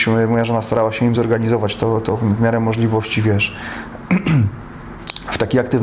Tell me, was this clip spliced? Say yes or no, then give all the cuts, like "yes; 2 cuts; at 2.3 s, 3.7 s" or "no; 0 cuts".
no; 0 cuts